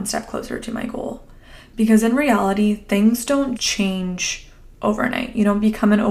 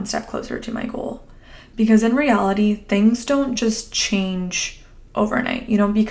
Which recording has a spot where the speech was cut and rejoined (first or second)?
first